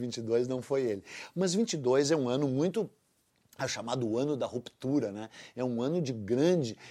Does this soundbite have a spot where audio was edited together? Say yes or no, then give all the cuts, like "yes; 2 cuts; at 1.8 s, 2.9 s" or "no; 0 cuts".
no; 0 cuts